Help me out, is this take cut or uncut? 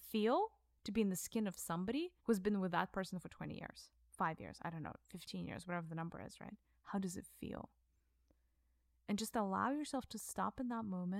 cut